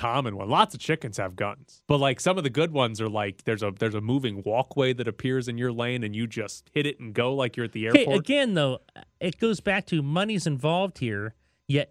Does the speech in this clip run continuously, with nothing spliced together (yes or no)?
no